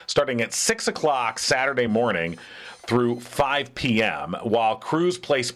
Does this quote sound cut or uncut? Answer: uncut